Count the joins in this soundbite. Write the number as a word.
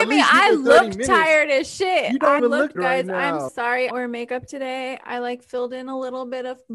four